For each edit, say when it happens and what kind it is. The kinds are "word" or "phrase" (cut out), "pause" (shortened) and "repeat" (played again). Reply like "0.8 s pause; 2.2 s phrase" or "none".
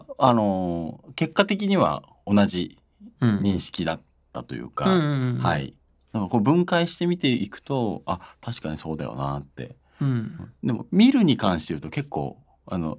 none